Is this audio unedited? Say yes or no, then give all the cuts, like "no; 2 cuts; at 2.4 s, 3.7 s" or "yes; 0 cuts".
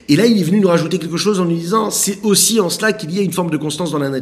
yes; 0 cuts